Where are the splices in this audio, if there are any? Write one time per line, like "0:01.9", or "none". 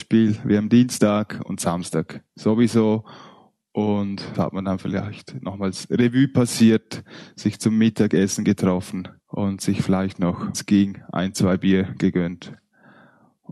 0:04.3
0:09.2
0:10.5